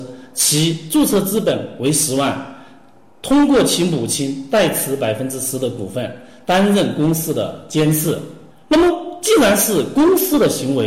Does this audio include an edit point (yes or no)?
no